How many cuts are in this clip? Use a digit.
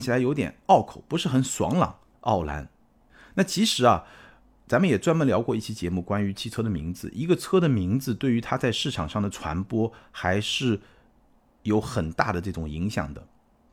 0